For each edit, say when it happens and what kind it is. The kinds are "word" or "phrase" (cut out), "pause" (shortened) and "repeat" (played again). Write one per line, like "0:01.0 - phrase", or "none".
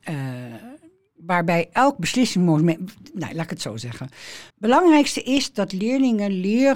0:04.5 - pause